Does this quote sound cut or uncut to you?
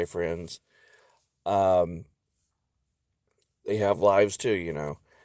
uncut